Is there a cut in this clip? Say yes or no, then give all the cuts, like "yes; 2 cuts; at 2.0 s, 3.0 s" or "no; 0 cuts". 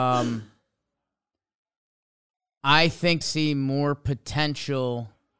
yes; 1 cut; at 3.2 s